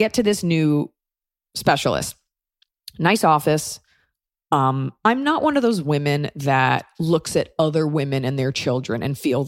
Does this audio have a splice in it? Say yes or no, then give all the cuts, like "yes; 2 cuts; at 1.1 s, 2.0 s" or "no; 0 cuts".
no; 0 cuts